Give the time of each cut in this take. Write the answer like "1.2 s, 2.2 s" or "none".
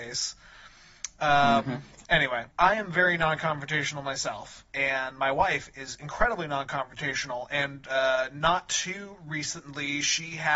2.5 s, 4.7 s